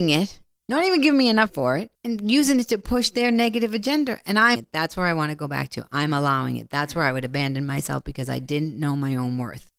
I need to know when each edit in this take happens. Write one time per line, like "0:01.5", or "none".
0:01.5
0:01.9
0:04.6

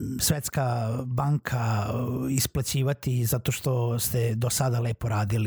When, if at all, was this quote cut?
none

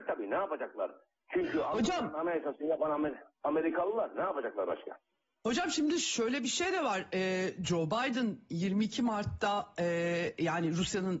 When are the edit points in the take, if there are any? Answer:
none

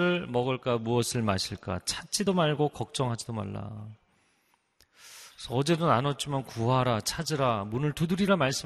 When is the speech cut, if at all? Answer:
none

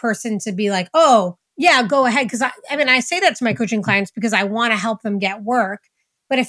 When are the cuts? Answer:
0:01.5

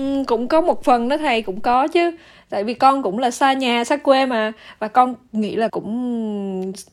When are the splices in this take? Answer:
0:05.7

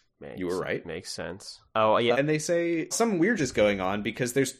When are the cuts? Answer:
0:01.7
0:02.1
0:02.9
0:03.4

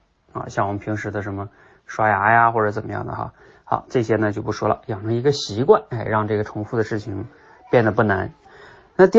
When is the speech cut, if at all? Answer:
none

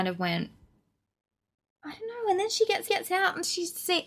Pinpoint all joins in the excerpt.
0:02.9

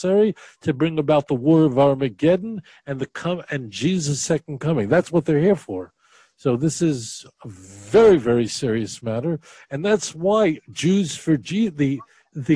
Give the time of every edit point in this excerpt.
none

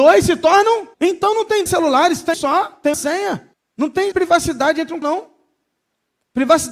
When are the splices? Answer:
0:00.9
0:01.7
0:02.3
0:02.9
0:03.5
0:04.1
0:05.0

